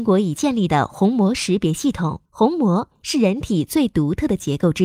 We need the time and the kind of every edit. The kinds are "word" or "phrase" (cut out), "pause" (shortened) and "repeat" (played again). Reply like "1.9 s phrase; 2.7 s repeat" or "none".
2.3 s pause